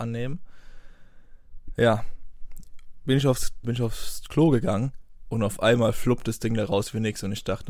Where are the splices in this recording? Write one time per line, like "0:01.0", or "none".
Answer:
0:03.6